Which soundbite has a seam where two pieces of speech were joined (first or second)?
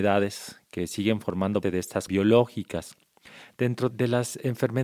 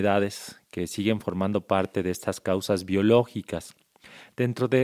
first